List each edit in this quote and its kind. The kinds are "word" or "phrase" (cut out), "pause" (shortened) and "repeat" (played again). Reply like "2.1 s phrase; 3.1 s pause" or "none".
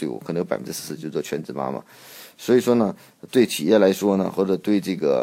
none